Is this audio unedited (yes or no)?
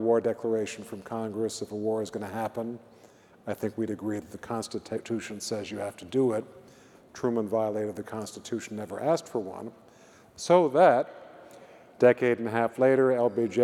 yes